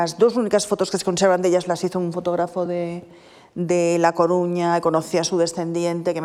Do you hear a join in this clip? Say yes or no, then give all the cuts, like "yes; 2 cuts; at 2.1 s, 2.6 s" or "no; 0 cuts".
no; 0 cuts